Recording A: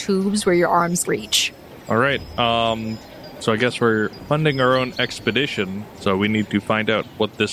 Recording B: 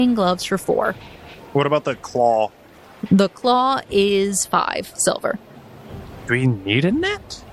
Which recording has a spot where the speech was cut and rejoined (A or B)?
A